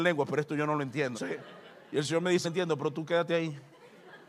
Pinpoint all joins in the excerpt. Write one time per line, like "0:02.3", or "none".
0:01.1
0:02.4

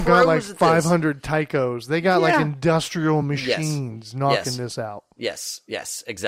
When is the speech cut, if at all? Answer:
none

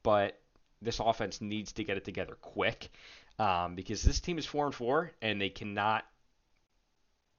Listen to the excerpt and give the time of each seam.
none

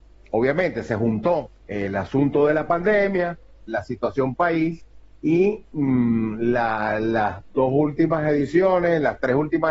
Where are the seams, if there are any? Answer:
0:01.6
0:03.7

